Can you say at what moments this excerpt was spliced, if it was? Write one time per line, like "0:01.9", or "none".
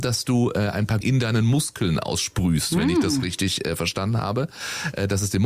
0:01.0